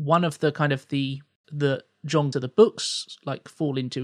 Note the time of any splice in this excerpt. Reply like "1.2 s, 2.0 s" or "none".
1.4 s, 2.3 s